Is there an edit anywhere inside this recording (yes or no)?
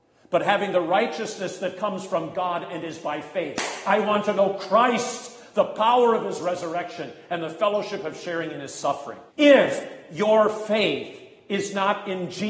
yes